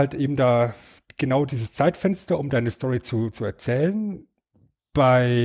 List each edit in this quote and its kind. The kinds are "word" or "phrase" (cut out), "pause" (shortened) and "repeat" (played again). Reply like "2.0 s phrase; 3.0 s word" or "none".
none

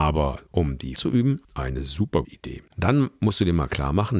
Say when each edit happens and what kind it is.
1.0 s word; 1.4 s pause; 2.2 s word; 2.7 s pause

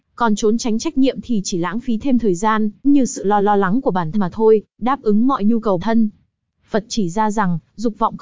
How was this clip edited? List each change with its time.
2.8 s word; 3.4 s repeat; 4.1 s word; 4.7 s pause; 5.8 s word

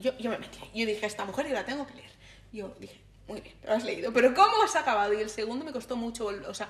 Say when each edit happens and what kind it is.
none

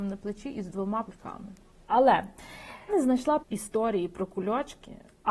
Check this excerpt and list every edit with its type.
1.0 s word; 2.9 s word; 3.4 s word

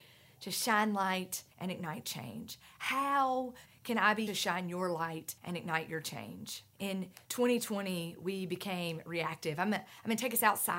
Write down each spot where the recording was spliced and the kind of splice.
1.5 s pause; 3.7 s word; 4.3 s word; 5.4 s pause; 6.7 s pause

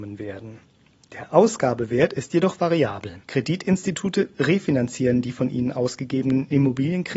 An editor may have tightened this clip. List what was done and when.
3.2 s pause

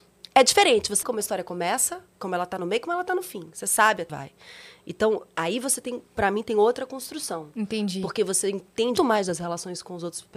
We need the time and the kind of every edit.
1.0 s word; 2.1 s pause; 4.1 s word; 9.0 s word

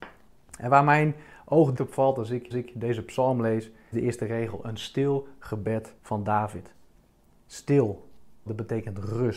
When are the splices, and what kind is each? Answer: 1.8 s word; 2.5 s repeat; 3.9 s word; 6.0 s pause; 8.5 s phrase

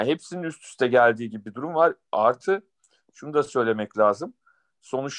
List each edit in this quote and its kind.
none

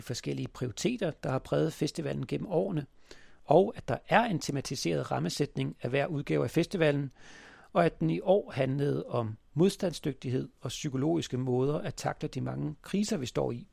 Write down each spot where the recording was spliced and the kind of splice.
none

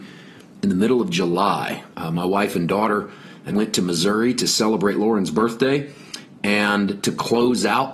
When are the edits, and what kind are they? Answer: 1.9 s pause; 3.5 s word

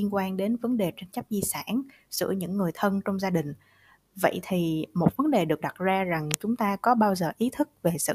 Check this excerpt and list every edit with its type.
none

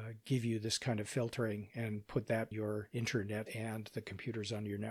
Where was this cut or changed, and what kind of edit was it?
2.5 s word; 3.5 s word

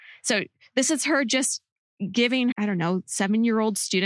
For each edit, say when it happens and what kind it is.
2.5 s word

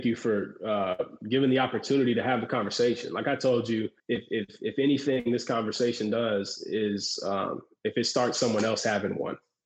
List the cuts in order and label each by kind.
4.0 s pause

